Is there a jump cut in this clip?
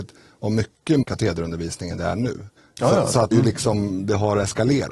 yes; 3 cuts; at 1.0 s, 2.6 s, 3.3 s

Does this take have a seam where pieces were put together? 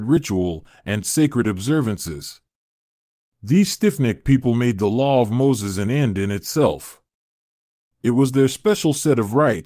no; 0 cuts

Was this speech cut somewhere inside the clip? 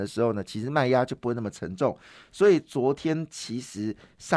no; 0 cuts

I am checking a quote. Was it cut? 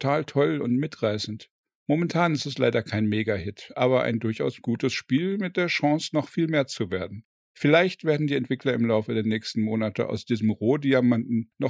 no; 0 cuts

